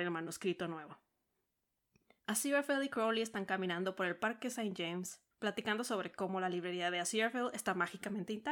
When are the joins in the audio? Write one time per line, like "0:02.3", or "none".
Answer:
0:05.3